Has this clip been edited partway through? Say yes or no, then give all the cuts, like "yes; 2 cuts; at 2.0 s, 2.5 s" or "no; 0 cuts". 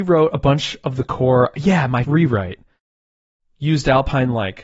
yes; 1 cut; at 2.0 s